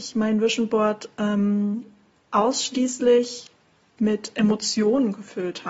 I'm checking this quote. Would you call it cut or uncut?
uncut